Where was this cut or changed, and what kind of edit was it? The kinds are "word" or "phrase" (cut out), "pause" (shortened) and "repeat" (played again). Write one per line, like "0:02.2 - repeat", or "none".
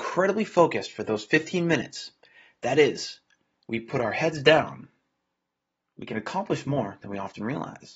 none